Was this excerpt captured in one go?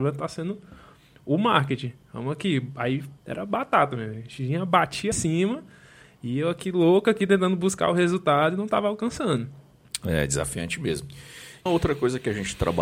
no; 3 cuts; at 3.2 s, 5.1 s, 11.7 s

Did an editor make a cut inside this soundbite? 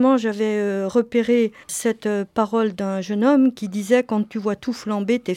yes; 1 cut; at 1.6 s

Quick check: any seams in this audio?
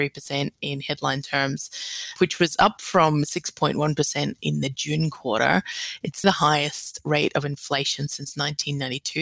yes; 2 cuts; at 2.2 s, 6.2 s

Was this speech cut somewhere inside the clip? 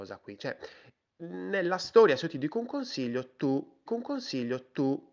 yes; 1 cut; at 3.9 s

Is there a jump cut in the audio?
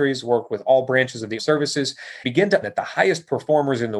yes; 3 cuts; at 1.4 s, 2.2 s, 2.6 s

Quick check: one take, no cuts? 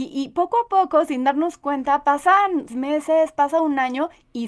no; 1 cut; at 2.7 s

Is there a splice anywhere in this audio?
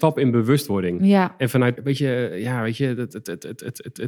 yes; 1 cut; at 1.8 s

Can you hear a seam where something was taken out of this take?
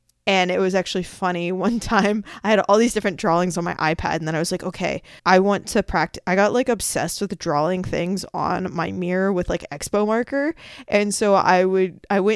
yes; 1 cut; at 5.2 s

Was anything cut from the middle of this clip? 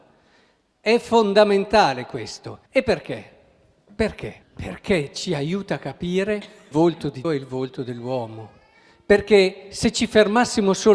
yes; 4 cuts; at 2.7 s, 4.4 s, 6.7 s, 7.2 s

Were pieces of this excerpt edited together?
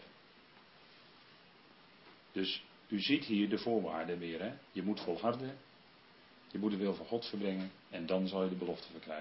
yes; 3 cuts; at 2.2 s, 4.7 s, 7.8 s

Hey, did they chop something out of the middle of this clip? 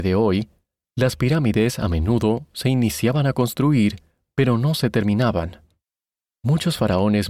no; 0 cuts

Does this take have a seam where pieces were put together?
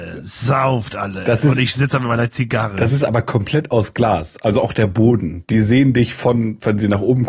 no; 0 cuts

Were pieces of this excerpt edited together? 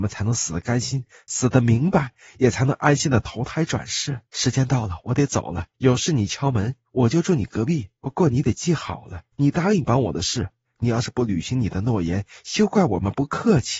yes; 6 cuts; at 4.3 s, 5.7 s, 6.9 s, 8.0 s, 9.3 s, 10.6 s

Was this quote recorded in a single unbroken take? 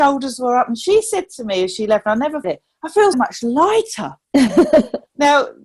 no; 2 cuts; at 2.4 s, 3.1 s

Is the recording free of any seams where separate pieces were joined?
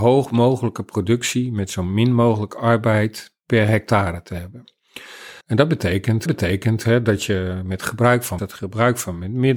no; 3 cuts; at 5.4 s, 6.3 s, 8.4 s

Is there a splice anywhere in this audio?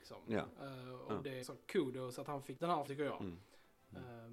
yes; 3 cuts; at 1.4 s, 2.6 s, 2.9 s

